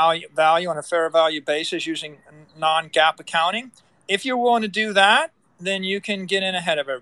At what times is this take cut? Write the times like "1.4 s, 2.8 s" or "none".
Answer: none

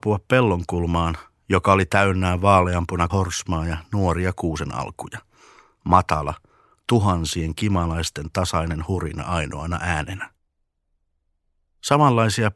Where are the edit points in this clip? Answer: 3.1 s

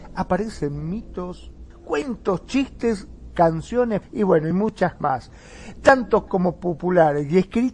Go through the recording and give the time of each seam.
1.7 s, 4.0 s, 5.0 s, 6.3 s

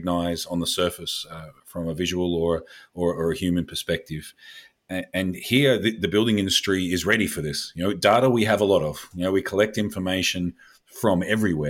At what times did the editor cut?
none

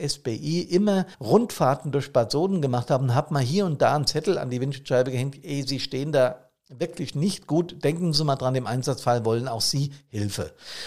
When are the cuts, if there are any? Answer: 1.1 s

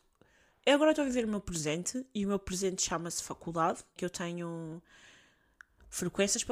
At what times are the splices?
4.0 s

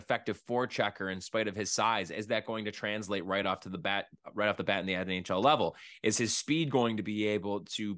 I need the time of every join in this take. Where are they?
none

